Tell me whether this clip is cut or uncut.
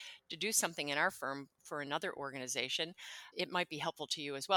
cut